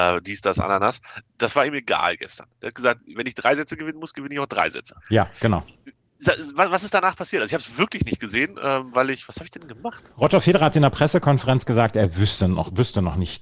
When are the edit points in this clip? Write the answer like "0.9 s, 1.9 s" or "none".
5.0 s